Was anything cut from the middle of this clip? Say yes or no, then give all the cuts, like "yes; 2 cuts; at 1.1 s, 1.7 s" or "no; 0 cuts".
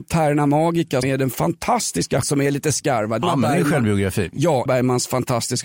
yes; 4 cuts; at 1.0 s, 2.2 s, 3.2 s, 4.7 s